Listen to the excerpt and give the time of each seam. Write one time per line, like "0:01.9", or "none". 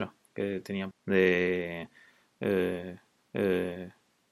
0:00.9
0:03.2